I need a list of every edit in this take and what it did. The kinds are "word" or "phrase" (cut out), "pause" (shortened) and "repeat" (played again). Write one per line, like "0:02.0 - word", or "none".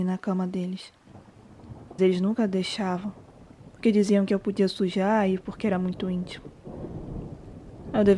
0:02.0 - word